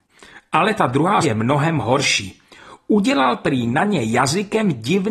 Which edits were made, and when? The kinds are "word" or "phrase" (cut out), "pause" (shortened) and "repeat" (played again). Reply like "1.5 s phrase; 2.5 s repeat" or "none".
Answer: 1.2 s word

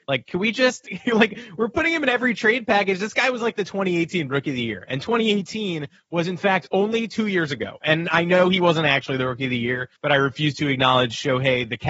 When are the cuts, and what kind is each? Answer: 10.0 s pause

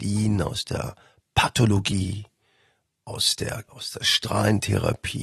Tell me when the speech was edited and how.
3.7 s word

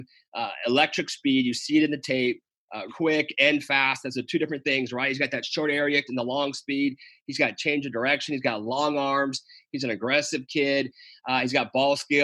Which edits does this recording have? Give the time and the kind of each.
2.9 s word; 6.1 s word

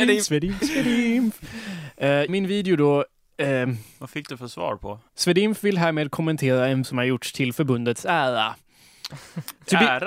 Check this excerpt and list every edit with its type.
2.3 s word; 5.1 s pause; 6.8 s word

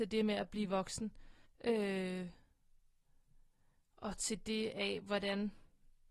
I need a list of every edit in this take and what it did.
1.5 s pause

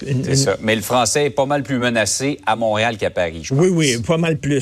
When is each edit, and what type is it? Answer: none

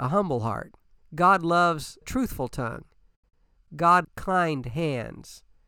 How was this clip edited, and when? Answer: 1.0 s pause; 2.0 s word; 4.0 s word

